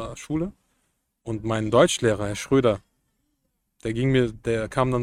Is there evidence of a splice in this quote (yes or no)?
no